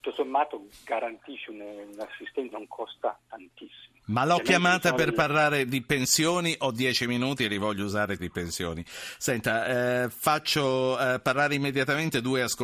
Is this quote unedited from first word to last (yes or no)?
no